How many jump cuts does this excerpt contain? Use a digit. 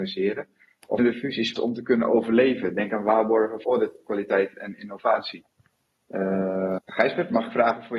4